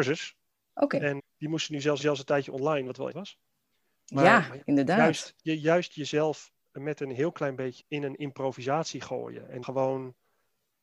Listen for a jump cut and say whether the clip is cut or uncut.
cut